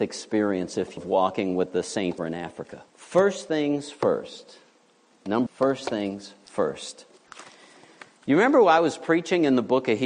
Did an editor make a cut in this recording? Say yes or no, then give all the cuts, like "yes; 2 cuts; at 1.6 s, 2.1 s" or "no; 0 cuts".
yes; 4 cuts; at 1.0 s, 2.2 s, 2.9 s, 5.5 s